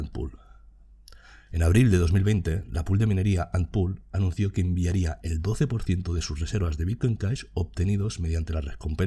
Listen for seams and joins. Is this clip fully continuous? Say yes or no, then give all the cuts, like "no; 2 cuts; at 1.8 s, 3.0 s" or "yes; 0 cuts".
yes; 0 cuts